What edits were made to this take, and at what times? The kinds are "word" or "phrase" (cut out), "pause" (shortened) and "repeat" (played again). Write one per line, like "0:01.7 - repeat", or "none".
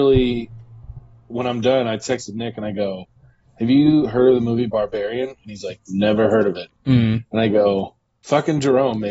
none